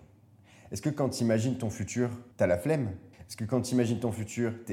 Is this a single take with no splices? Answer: no; 2 cuts; at 2.3 s, 3.1 s

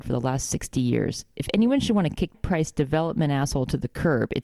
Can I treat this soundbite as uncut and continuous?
no; 1 cut; at 2.3 s

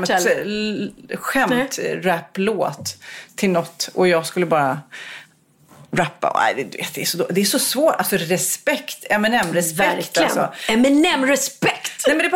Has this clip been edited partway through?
no; 0 cuts

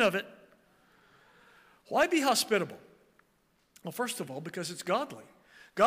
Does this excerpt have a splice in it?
no; 0 cuts

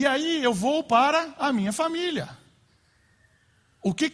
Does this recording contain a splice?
no; 0 cuts

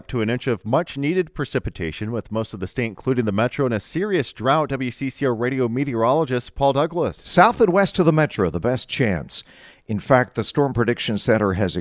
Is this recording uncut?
yes; 0 cuts

